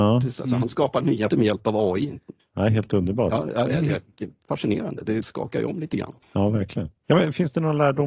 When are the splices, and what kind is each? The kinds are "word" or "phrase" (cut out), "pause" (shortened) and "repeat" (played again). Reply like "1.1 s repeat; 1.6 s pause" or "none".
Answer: 1.3 s word; 2.4 s pause; 5.2 s word; 6.2 s pause; 7.0 s pause

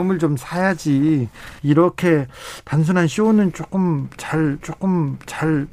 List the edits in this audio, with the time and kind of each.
1.6 s pause; 4.6 s repeat

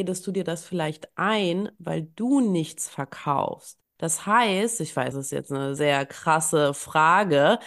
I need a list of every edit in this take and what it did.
3.9 s pause; 5.1 s word; 5.8 s word

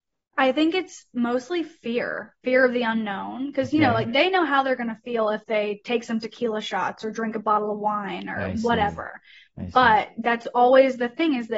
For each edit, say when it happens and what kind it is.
none

